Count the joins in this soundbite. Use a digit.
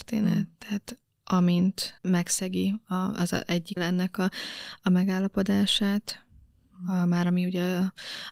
2